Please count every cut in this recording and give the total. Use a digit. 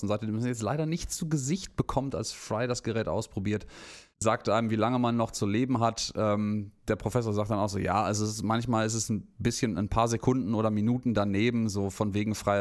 1